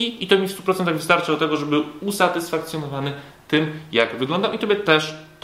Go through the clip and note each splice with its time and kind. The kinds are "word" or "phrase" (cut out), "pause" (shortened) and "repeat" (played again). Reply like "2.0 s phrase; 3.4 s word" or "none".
none